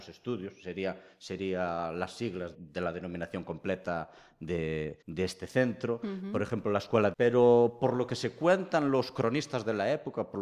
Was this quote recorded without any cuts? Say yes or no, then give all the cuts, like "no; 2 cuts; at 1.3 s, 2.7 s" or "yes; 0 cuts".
no; 3 cuts; at 2.5 s, 5.0 s, 7.1 s